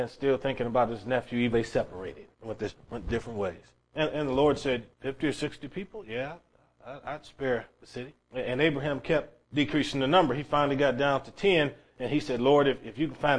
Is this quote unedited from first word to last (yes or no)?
no